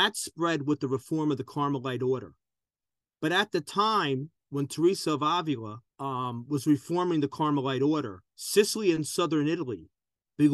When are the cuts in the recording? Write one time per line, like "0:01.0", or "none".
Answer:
0:05.9
0:08.3

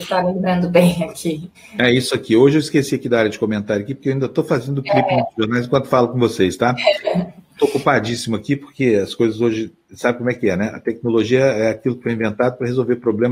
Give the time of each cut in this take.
0:01.5

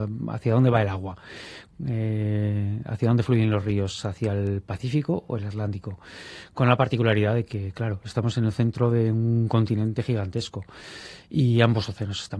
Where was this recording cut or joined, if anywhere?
none

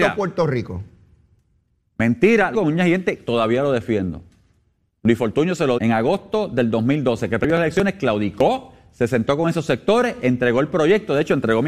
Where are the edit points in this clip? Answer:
0:02.5
0:05.8

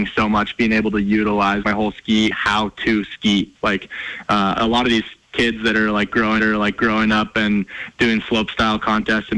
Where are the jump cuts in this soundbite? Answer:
0:01.6
0:02.3
0:05.2
0:06.4

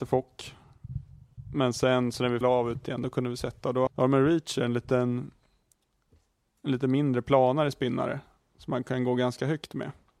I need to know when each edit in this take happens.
0:02.4
0:02.8
0:03.9

